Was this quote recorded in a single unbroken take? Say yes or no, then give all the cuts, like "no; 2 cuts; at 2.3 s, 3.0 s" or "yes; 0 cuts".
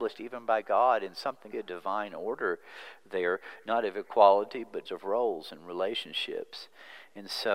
no; 2 cuts; at 1.5 s, 4.9 s